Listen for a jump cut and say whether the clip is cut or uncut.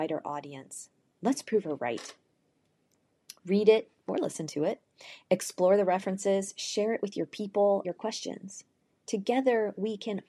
cut